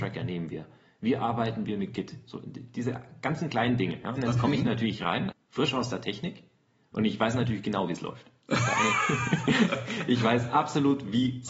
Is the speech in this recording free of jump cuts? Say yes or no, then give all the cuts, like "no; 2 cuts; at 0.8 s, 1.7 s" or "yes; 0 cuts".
no; 1 cut; at 5.3 s